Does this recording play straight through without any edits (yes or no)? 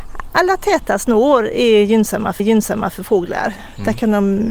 no